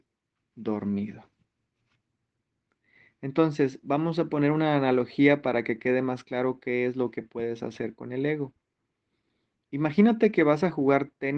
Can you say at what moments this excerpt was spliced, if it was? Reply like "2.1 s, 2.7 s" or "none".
none

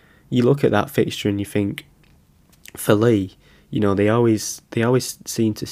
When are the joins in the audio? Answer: none

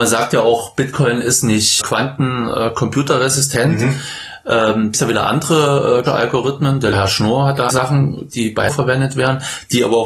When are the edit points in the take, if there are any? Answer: 1.8 s, 4.9 s, 6.1 s, 6.9 s, 7.7 s, 8.3 s, 8.7 s

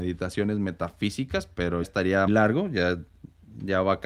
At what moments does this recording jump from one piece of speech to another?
1.8 s, 2.3 s

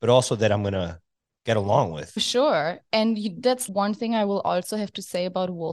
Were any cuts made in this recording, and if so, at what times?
1.2 s

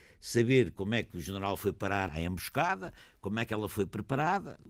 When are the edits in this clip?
none

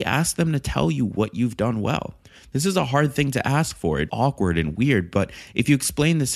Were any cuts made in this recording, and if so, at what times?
4.1 s

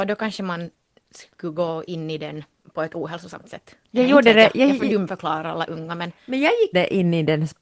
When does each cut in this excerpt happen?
2.6 s, 3.8 s, 6.7 s

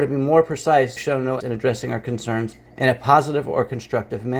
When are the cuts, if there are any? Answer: 1.0 s, 1.4 s, 2.7 s

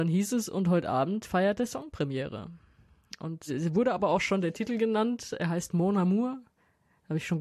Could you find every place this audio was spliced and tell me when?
none

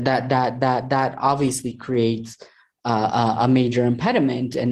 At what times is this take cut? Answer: none

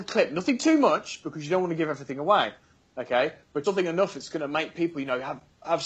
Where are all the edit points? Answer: 3.6 s

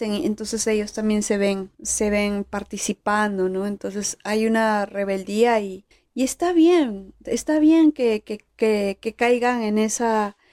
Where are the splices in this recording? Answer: 1.7 s, 5.9 s

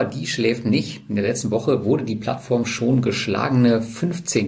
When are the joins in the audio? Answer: none

